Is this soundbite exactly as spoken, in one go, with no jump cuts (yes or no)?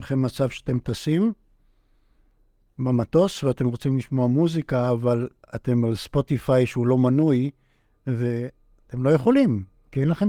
yes